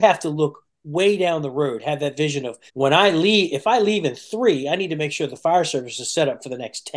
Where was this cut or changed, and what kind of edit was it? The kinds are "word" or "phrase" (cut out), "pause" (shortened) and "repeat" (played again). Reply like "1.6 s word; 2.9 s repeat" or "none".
2.7 s pause